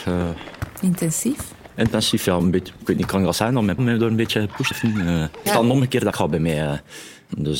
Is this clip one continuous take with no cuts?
no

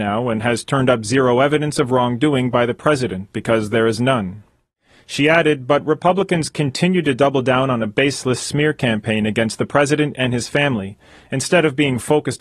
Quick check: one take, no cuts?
yes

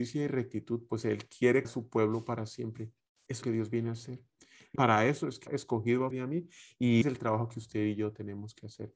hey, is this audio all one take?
no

